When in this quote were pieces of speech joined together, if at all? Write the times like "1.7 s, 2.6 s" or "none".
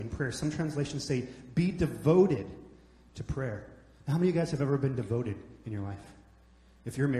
none

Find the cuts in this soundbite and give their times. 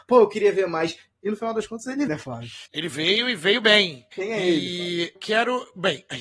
2.1 s, 2.7 s, 4.1 s, 5.2 s

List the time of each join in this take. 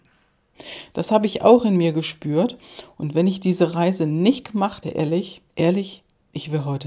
4.8 s, 5.5 s

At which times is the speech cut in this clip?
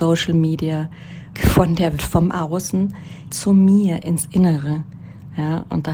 1.3 s, 2.0 s, 3.3 s

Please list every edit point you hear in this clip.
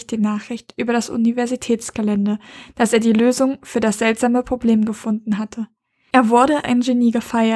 6.6 s

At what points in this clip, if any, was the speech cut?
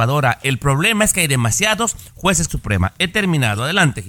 2.5 s

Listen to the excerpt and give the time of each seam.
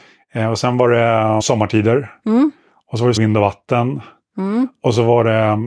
1.4 s, 3.2 s

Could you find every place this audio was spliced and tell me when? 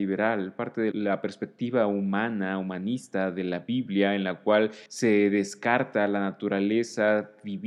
0.9 s, 4.9 s

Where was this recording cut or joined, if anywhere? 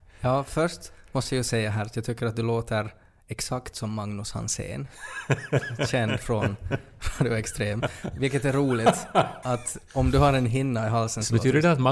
9.4 s

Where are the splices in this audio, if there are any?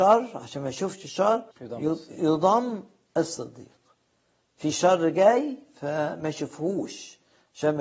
1.5 s

